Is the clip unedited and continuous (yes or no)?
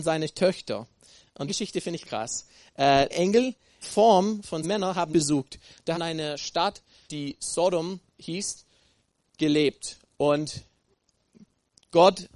no